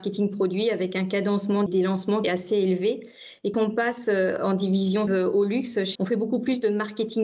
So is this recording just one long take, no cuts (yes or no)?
no